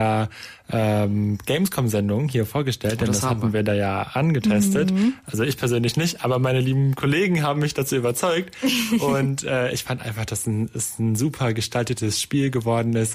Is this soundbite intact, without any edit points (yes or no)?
yes